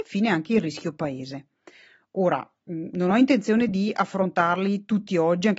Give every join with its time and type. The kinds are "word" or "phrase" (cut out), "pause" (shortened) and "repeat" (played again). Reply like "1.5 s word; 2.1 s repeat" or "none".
none